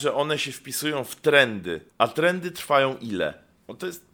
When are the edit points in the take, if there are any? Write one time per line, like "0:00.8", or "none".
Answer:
0:01.9